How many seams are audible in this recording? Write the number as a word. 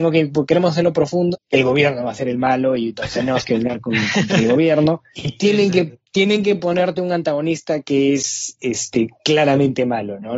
two